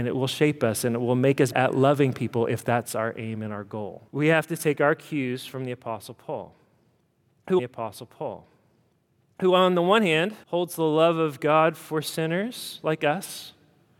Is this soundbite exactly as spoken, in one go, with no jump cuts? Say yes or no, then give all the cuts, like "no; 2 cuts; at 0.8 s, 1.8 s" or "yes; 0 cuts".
no; 4 cuts; at 1.5 s, 4.1 s, 7.6 s, 10.4 s